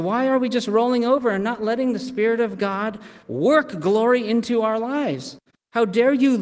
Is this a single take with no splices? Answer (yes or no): no